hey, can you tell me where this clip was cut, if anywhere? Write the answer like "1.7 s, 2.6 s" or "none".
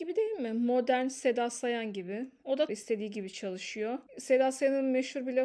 2.7 s